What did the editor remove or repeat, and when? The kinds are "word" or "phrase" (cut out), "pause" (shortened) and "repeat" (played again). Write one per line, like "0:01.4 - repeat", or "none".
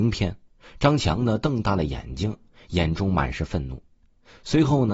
none